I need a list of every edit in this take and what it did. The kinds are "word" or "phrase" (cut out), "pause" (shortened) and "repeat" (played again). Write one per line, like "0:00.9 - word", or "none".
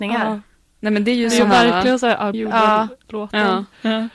0:02.3 - phrase

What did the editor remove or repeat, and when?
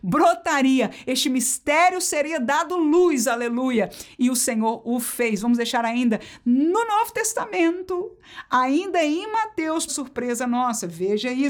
0:09.9 - word

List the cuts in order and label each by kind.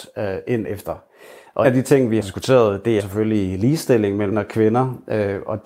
0:01.6 - word
0:02.2 - word
0:03.0 - word
0:04.3 - word

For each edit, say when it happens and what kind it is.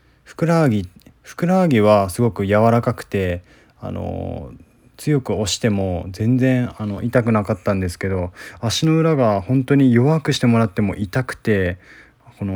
none

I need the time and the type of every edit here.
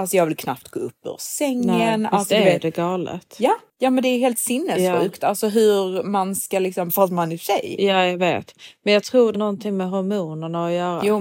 0:06.9 - phrase
0:09.3 - word

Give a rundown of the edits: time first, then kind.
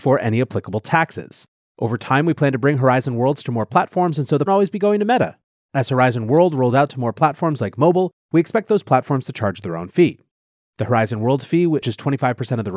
0:04.5 - phrase

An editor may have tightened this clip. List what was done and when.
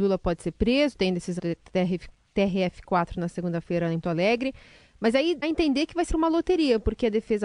0:01.4 - word
0:04.0 - word
0:05.4 - word
0:06.1 - word

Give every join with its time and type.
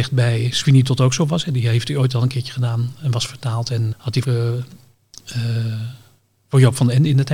0:03.9 - word
0:04.2 - word

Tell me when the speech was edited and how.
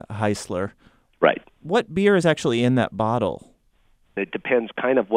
none

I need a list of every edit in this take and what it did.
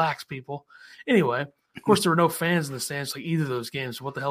none

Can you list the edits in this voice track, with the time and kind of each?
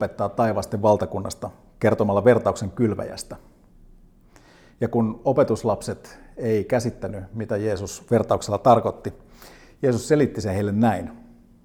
none

